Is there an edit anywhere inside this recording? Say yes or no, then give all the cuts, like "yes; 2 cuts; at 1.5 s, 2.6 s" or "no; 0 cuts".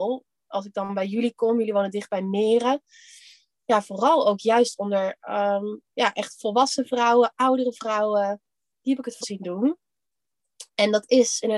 yes; 2 cuts; at 5.9 s, 9.2 s